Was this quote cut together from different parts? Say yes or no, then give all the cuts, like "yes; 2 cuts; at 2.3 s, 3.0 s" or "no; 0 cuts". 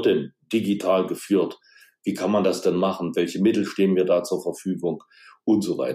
no; 0 cuts